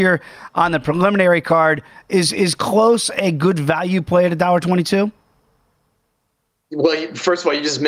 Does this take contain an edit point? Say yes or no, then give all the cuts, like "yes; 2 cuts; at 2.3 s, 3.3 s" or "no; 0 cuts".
no; 0 cuts